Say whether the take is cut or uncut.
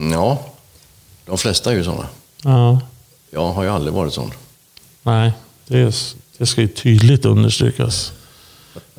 uncut